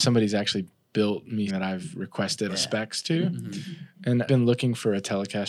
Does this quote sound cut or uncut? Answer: cut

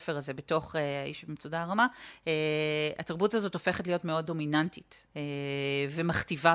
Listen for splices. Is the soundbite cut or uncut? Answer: cut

